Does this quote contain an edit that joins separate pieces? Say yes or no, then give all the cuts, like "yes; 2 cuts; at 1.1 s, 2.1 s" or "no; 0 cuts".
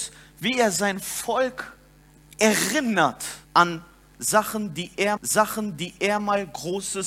yes; 2 cuts; at 3.4 s, 5.2 s